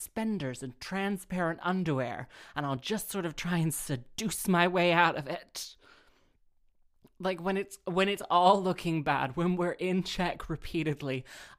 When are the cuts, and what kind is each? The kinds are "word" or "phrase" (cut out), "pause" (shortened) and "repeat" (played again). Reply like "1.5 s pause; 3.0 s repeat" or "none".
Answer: none